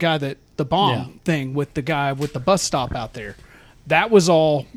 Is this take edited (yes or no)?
no